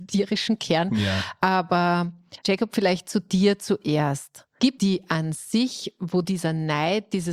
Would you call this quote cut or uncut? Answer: cut